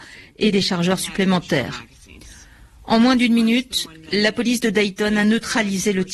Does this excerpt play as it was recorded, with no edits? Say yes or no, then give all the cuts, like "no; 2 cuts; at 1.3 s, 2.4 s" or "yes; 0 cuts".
yes; 0 cuts